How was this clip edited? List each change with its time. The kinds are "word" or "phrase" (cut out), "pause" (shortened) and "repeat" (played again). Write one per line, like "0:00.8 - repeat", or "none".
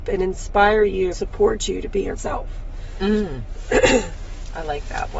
0:01.1 - word
0:02.2 - word